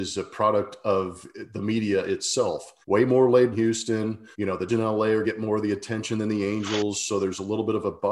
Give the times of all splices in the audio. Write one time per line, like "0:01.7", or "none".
0:02.8
0:03.5
0:04.3
0:04.7
0:05.2